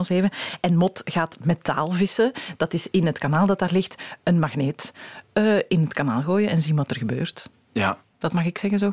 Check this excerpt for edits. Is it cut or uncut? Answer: uncut